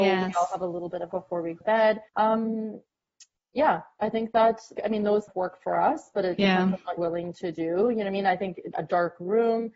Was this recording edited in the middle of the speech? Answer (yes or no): yes